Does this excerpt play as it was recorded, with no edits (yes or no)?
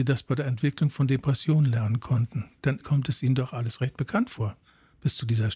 no